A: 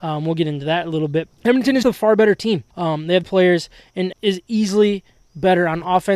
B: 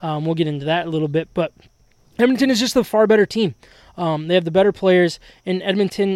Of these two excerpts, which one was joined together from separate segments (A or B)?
A